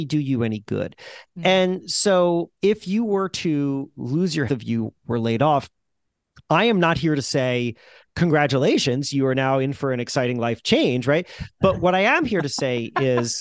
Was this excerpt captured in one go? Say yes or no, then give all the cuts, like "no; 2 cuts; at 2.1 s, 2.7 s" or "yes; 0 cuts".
no; 2 cuts; at 2.6 s, 4.5 s